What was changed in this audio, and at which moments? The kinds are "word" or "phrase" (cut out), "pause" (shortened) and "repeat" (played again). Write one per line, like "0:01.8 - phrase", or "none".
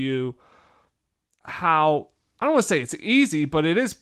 none